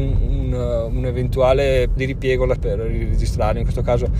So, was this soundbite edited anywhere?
yes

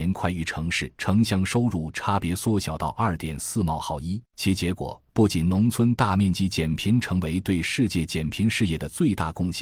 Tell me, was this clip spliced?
yes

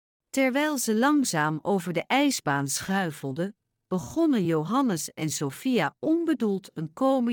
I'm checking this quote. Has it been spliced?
no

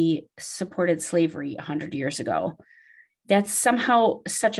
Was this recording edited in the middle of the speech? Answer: no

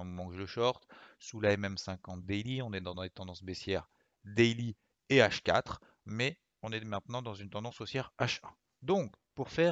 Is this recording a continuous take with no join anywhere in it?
yes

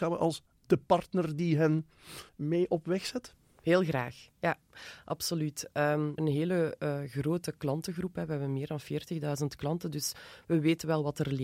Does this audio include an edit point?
yes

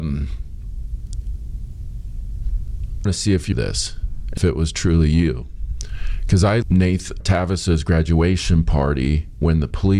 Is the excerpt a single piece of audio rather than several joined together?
no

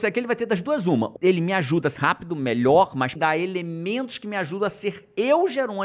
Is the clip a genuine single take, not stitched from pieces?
no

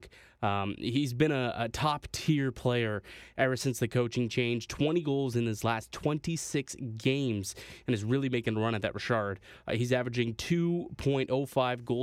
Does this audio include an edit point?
no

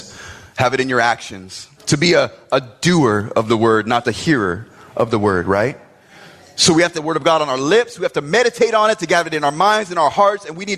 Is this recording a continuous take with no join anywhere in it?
no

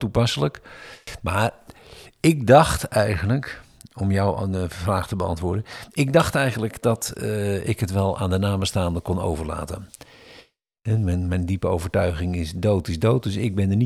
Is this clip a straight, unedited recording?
yes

